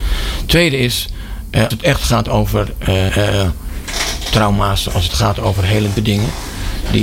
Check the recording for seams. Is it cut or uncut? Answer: cut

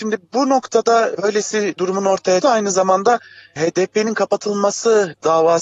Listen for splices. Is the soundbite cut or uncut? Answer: cut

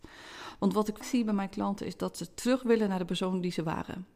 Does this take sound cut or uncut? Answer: cut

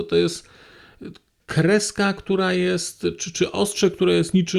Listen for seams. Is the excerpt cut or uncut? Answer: uncut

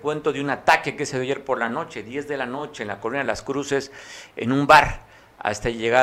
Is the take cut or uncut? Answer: uncut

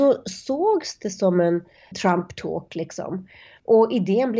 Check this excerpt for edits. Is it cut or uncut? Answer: uncut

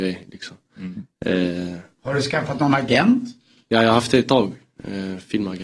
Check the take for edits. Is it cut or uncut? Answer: uncut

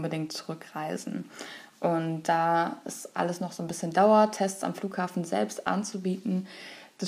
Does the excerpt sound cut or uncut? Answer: uncut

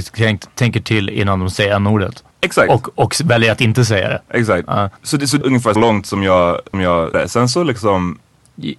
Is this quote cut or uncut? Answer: cut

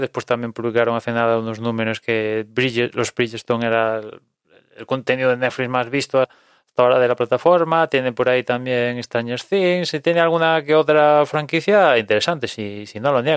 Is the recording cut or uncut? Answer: cut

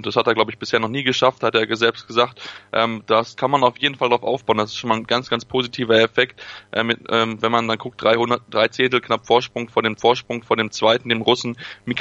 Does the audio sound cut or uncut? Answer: cut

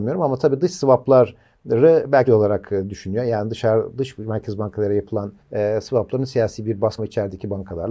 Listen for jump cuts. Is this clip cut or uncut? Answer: cut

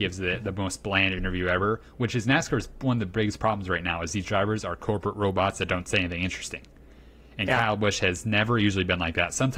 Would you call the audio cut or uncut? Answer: uncut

